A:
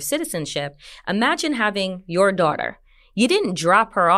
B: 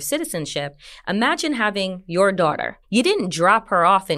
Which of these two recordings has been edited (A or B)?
B